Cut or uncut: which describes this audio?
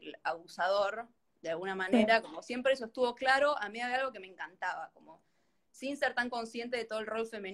uncut